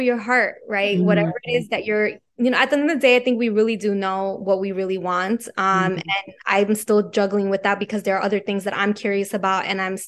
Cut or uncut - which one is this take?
uncut